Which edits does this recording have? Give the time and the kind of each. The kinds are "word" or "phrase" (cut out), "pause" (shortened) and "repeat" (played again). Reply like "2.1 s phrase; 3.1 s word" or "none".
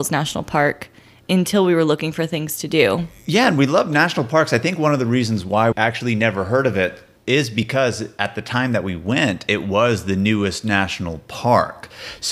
5.7 s word